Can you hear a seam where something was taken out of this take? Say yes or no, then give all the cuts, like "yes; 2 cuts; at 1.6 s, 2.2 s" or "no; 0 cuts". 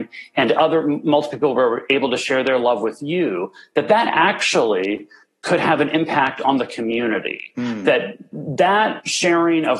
no; 0 cuts